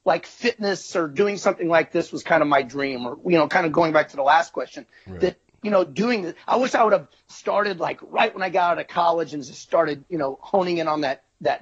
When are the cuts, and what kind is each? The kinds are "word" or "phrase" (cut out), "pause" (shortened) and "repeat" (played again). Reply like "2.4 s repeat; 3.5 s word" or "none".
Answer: none